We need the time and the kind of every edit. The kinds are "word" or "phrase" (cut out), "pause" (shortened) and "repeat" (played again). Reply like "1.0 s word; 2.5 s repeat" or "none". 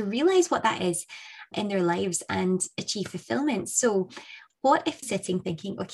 1.5 s word; 5.0 s word